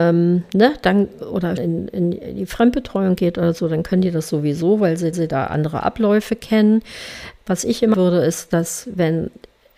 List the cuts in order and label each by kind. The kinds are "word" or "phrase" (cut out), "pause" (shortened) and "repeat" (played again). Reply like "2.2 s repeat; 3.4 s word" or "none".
1.2 s word; 1.6 s word; 5.1 s repeat; 7.9 s word